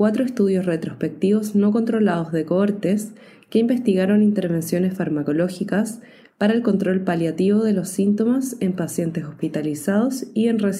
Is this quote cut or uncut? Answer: uncut